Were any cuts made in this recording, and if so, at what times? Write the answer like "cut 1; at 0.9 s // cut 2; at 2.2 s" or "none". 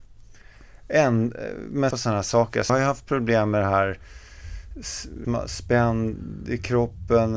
cut 1; at 1.9 s // cut 2; at 2.7 s // cut 3; at 5.2 s